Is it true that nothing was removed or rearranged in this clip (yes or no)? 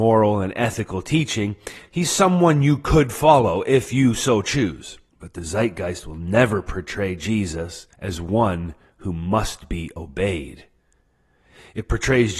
no